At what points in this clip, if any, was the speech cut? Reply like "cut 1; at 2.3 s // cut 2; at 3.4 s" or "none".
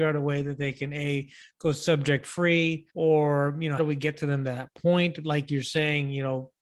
cut 1; at 2.9 s // cut 2; at 3.8 s